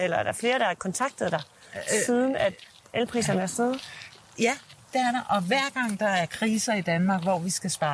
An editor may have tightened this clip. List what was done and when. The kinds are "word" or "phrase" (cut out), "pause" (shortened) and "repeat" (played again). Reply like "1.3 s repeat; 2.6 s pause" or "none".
none

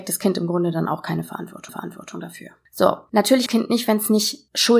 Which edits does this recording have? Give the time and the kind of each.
1.7 s repeat; 3.5 s phrase

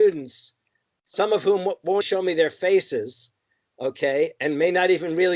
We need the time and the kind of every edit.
2.0 s word

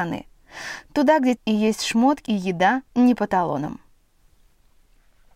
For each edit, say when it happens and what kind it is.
1.4 s word; 2.3 s word; 2.9 s pause

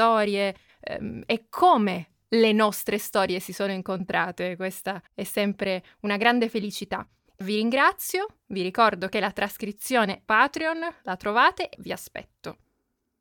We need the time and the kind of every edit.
5.1 s pause; 7.4 s word; 10.3 s phrase; 11.7 s word

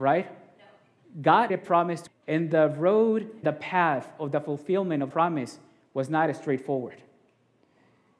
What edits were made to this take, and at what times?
1.5 s word; 2.1 s word; 3.4 s word; 5.1 s word

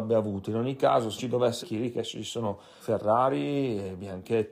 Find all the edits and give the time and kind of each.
1.2 s word; 1.6 s word; 2.8 s word

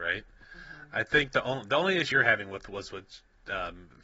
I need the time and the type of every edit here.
2.1 s word

